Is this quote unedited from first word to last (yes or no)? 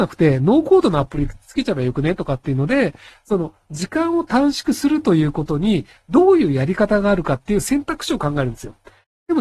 yes